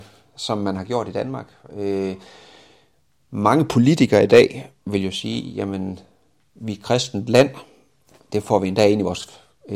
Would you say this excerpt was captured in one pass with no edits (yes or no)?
yes